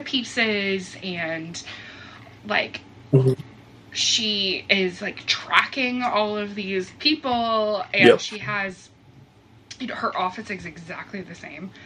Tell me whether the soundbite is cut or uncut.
uncut